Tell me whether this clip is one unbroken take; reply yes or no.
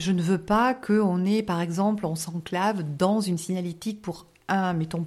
yes